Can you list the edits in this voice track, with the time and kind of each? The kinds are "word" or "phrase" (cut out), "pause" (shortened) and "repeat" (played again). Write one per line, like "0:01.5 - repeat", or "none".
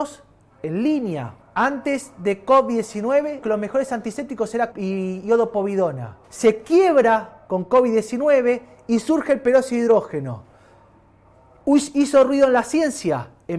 0:01.4 - pause
0:03.4 - word
0:04.7 - word
0:06.2 - pause